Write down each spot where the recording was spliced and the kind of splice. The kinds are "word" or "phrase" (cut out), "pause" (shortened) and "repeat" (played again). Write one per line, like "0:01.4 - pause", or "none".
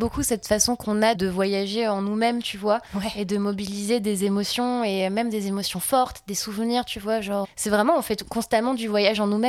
0:01.1 - word
0:07.4 - word